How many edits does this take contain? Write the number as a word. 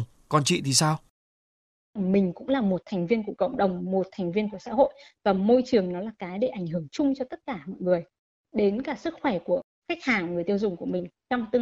zero